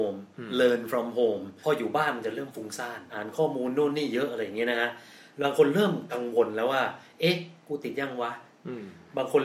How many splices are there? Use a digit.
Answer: 0